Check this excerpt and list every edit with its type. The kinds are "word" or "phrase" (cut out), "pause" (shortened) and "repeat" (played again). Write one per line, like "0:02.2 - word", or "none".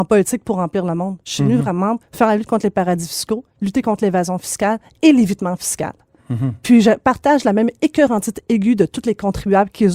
0:02.0 - word